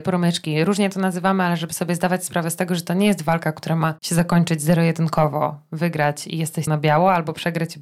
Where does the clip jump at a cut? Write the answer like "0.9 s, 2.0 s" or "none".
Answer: 4.0 s, 6.7 s